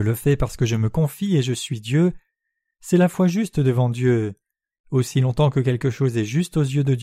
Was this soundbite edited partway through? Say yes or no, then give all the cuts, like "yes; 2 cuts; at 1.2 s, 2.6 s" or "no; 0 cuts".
no; 0 cuts